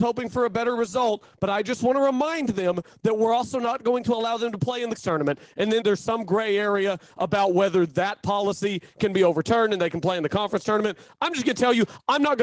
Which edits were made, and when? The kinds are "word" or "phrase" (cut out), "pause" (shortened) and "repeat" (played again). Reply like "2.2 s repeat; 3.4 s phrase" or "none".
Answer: 5.0 s word; 5.8 s word